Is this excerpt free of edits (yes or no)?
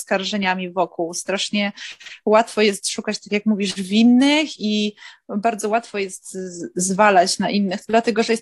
yes